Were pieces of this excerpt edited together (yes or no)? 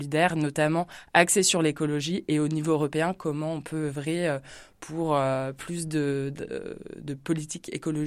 no